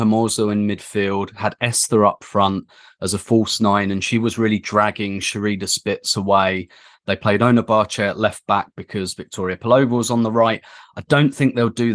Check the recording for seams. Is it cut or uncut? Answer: uncut